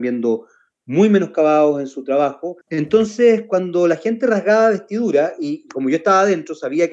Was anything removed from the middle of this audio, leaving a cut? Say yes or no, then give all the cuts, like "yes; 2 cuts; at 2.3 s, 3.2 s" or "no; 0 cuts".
yes; 1 cut; at 2.6 s